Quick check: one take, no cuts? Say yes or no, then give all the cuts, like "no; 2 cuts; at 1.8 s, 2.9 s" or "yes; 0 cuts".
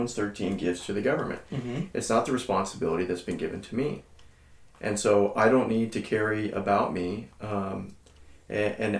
yes; 0 cuts